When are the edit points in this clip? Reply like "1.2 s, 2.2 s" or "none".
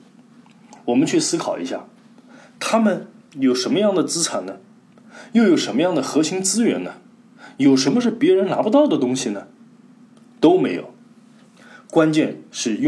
none